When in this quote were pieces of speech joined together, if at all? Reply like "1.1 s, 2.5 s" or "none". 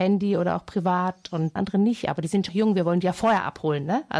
1.6 s, 2.5 s